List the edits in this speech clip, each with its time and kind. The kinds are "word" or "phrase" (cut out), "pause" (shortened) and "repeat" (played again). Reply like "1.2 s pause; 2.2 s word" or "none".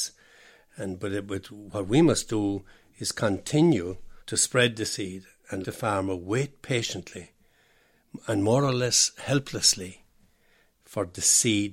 4.2 s pause; 5.6 s word